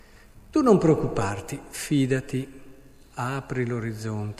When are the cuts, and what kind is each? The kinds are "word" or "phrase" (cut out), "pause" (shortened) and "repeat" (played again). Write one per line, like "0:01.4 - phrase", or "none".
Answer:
none